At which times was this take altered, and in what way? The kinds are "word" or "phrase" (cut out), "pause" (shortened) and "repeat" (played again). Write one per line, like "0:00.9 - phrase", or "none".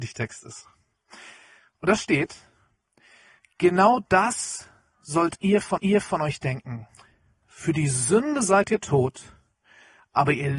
0:05.8 - repeat